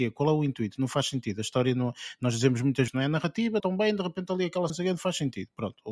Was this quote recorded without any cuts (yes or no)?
no